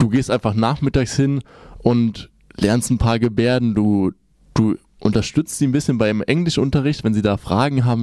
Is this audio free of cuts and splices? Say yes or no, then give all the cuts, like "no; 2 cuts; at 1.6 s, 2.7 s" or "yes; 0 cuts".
yes; 0 cuts